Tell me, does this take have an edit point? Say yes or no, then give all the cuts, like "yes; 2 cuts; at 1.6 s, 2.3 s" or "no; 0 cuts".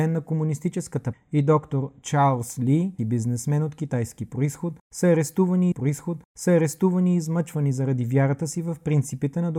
yes; 3 cuts; at 1.1 s, 3.0 s, 5.7 s